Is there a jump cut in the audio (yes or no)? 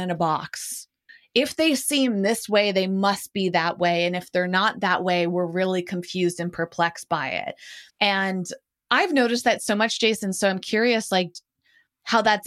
yes